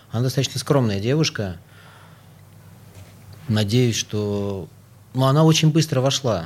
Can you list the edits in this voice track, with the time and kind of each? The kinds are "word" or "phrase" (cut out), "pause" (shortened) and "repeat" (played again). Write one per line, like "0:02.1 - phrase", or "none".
none

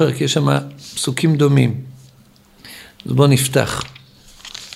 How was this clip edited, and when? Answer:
none

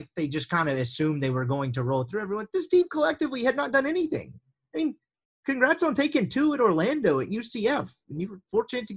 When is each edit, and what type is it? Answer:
none

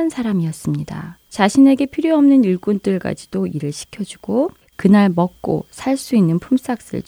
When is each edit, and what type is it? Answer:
0:01.2 - pause
0:04.6 - word

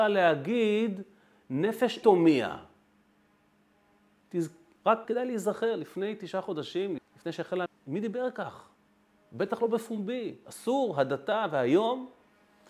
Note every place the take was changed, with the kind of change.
0:02.0 - word
0:05.0 - word
0:07.0 - word
0:07.7 - word

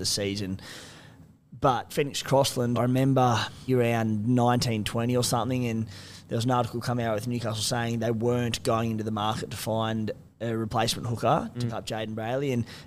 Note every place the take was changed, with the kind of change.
0:01.9 - word
0:02.7 - word
0:03.7 - word
0:11.7 - word

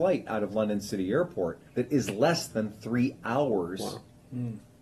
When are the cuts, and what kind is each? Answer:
0:01.7 - pause

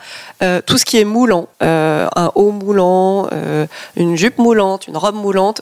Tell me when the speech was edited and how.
0:01.5 - pause

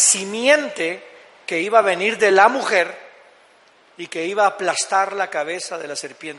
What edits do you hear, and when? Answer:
none

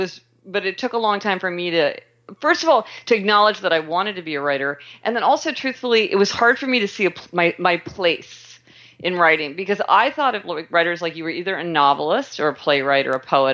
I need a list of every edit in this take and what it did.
none

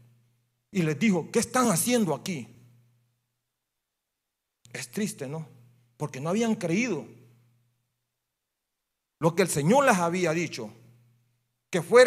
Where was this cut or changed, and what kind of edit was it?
none

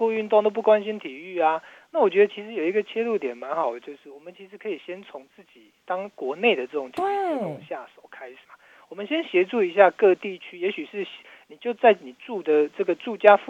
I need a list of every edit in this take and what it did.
0:05.8 - pause
0:08.4 - pause

